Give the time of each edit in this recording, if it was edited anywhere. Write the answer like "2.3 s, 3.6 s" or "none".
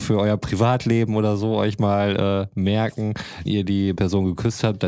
3.5 s, 4.0 s